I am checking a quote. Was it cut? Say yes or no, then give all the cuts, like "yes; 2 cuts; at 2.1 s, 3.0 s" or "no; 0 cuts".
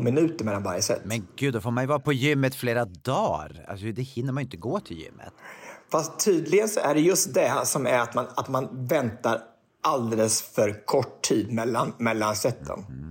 no; 0 cuts